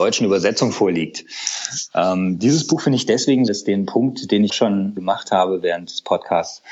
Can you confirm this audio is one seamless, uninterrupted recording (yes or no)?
no